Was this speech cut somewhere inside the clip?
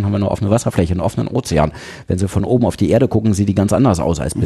no; 0 cuts

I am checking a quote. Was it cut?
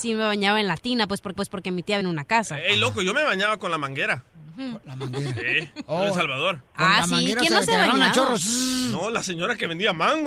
yes; 3 cuts; at 1.4 s, 2.0 s, 6.7 s

